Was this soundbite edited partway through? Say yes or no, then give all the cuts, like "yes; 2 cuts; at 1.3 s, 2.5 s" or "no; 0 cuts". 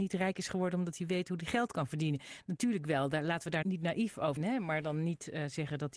yes; 2 cuts; at 3.6 s, 4.4 s